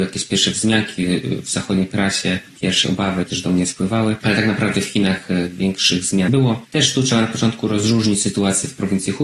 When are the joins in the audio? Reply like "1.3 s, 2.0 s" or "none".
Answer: 2.8 s, 3.3 s, 6.3 s